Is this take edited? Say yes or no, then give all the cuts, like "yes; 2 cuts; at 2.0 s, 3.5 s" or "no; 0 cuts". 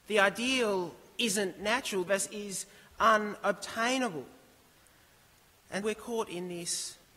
yes; 2 cuts; at 2.1 s, 5.8 s